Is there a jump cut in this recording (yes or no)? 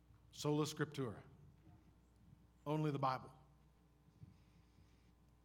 no